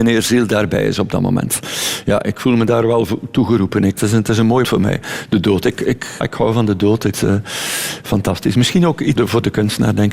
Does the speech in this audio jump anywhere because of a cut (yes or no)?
yes